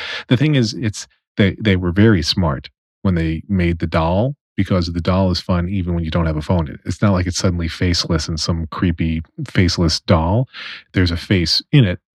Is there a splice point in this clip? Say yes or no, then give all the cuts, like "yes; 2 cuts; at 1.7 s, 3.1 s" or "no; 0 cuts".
no; 0 cuts